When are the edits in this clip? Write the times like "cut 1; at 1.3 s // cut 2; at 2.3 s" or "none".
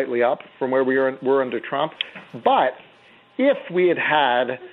none